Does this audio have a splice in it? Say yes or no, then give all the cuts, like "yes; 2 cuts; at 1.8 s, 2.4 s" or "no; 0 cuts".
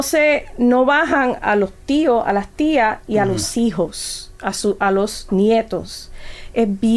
no; 0 cuts